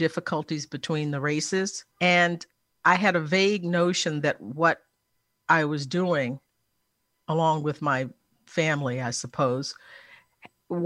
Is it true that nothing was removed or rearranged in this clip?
no; 1 cut; at 1.9 s

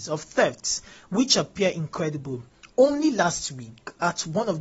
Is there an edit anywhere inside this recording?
yes; 1 cut; at 2.7 s

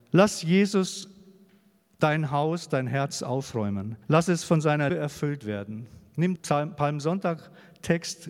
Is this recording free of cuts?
no; 3 cuts; at 4.0 s, 4.9 s, 6.4 s

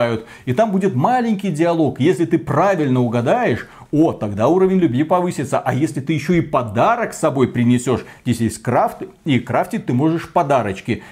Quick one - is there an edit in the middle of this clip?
no; 0 cuts

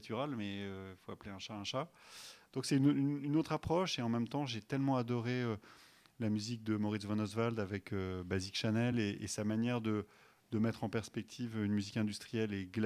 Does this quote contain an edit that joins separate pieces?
no; 0 cuts

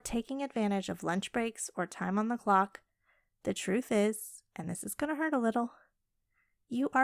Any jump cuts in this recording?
no; 0 cuts

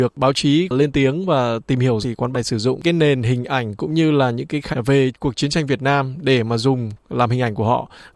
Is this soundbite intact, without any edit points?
no; 3 cuts; at 2.0 s, 2.3 s, 4.7 s

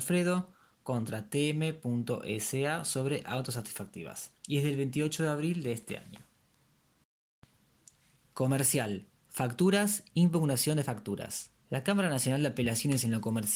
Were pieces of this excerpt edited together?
yes; 3 cuts; at 4.4 s, 9.2 s, 11.6 s

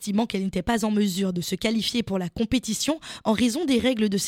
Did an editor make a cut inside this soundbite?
no; 0 cuts

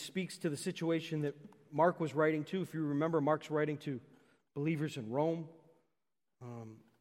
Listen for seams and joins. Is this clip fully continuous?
yes; 0 cuts

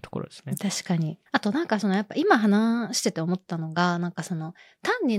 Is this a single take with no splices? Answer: no; 1 cut; at 1.3 s

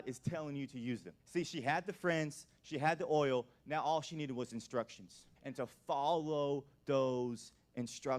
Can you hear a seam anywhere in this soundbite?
yes; 2 cuts; at 1.2 s, 5.4 s

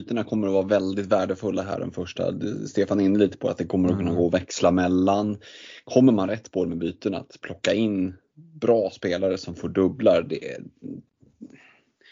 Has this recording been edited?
no; 0 cuts

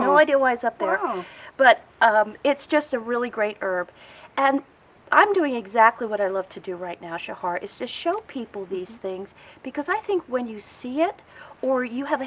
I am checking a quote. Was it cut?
no; 0 cuts

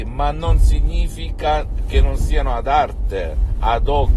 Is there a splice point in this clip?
no; 0 cuts

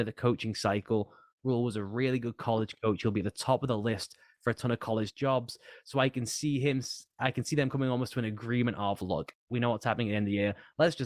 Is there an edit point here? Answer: no; 0 cuts

